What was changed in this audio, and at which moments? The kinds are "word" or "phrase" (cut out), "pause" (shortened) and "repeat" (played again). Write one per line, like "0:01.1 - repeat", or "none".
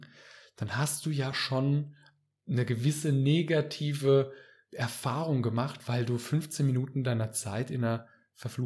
none